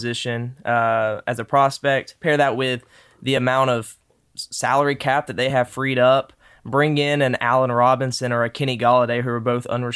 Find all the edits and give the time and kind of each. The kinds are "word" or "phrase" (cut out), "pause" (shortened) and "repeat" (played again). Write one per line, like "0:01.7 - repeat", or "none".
none